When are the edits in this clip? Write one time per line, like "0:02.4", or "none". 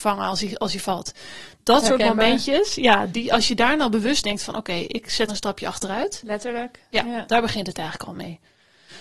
0:04.2
0:05.3